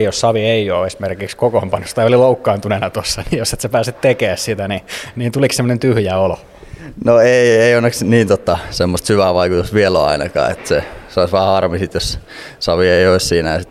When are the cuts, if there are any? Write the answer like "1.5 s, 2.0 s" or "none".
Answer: none